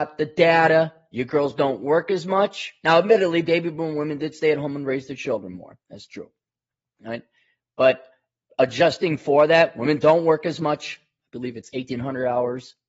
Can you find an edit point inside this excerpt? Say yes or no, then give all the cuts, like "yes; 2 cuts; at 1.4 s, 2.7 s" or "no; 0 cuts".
no; 0 cuts